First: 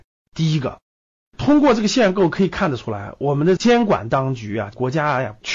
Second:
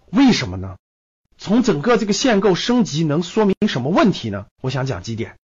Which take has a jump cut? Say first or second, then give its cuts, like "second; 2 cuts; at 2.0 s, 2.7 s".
second; 2 cuts; at 1.0 s, 4.5 s